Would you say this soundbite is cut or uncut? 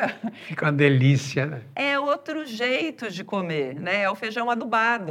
uncut